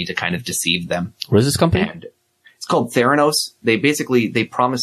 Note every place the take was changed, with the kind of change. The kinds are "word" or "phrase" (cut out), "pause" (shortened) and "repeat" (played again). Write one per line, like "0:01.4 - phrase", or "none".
none